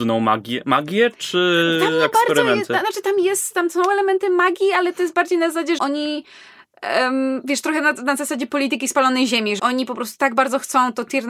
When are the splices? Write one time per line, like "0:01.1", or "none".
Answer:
0:05.8
0:09.6